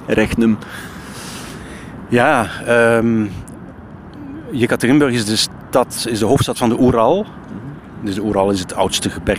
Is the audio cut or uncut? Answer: uncut